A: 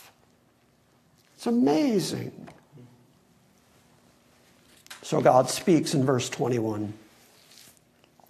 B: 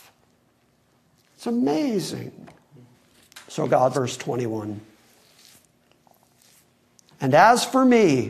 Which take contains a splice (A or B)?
B